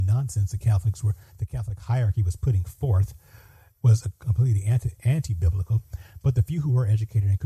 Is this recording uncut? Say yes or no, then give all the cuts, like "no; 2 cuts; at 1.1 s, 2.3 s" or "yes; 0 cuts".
yes; 0 cuts